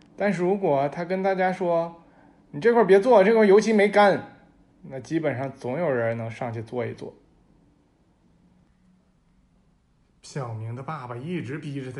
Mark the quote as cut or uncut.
uncut